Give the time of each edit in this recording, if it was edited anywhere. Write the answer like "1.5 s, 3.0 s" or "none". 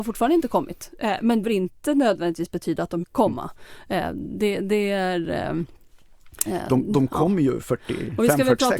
1.4 s, 3.0 s